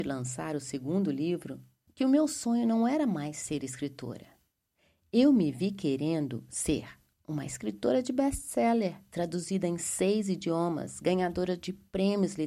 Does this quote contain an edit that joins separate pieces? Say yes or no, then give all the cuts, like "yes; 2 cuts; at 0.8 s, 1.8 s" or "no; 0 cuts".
no; 0 cuts